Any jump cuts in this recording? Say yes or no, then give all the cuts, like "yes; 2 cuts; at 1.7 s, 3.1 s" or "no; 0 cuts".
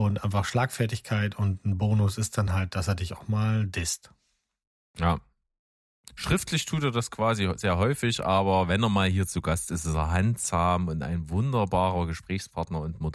no; 0 cuts